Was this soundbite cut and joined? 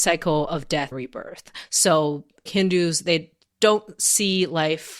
yes; 2 cuts; at 0.9 s, 2.5 s

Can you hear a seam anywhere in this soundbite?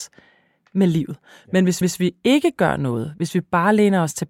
yes; 1 cut; at 1.8 s

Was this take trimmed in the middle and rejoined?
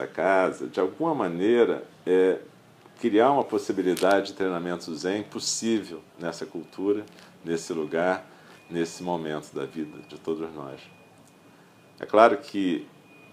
no; 0 cuts

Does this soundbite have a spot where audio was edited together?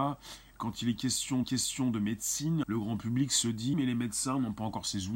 yes; 3 cuts; at 1.4 s, 2.6 s, 3.7 s

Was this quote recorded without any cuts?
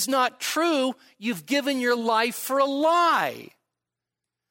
yes; 0 cuts

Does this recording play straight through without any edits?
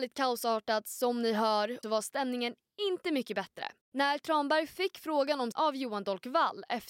no; 3 cuts; at 1.8 s, 3.8 s, 5.5 s

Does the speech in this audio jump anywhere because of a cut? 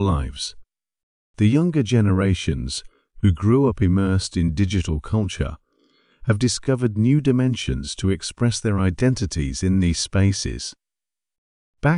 no; 0 cuts

